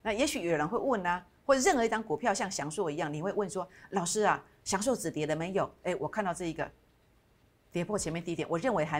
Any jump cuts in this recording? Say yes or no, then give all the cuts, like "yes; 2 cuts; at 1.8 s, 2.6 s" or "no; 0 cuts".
no; 0 cuts